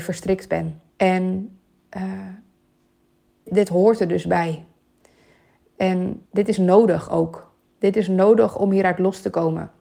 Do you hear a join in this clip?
yes; 3 cuts; at 0.9 s, 3.5 s, 6.3 s

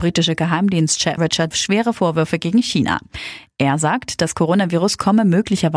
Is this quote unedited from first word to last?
no; 2 cuts; at 1.2 s, 1.5 s

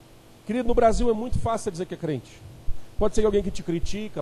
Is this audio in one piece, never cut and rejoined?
yes; 0 cuts

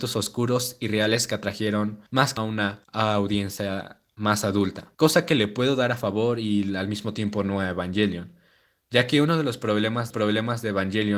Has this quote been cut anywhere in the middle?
yes; 4 cuts; at 2.1 s, 2.4 s, 4.9 s, 10.1 s

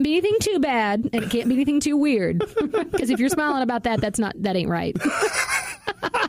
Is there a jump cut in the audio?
no; 0 cuts

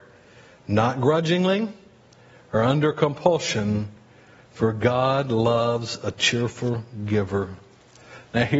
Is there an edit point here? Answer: no; 0 cuts

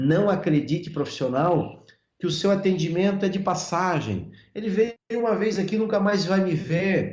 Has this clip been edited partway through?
no; 0 cuts

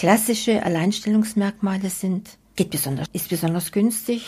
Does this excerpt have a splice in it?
yes; 2 cuts; at 2.6 s, 3.1 s

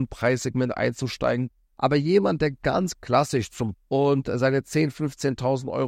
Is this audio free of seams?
no; 1 cut; at 3.7 s

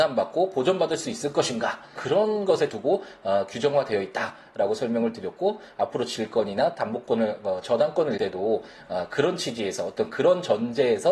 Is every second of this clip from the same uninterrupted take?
no; 3 cuts; at 2.0 s, 2.7 s, 8.2 s

